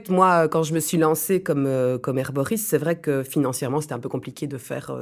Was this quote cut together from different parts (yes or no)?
no